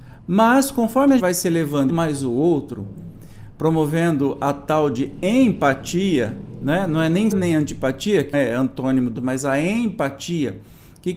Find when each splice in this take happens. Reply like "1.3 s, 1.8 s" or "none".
1.2 s, 1.9 s, 7.3 s, 8.3 s, 9.2 s